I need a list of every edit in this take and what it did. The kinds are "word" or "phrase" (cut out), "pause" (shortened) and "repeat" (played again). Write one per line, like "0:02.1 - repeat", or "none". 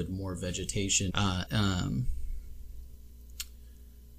0:01.1 - word
0:01.5 - phrase